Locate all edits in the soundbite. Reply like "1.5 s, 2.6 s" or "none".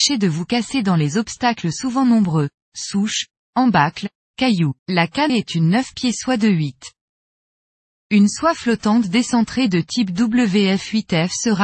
4.8 s, 5.3 s